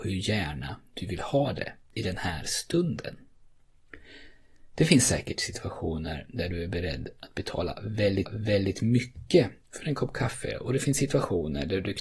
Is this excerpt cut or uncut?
cut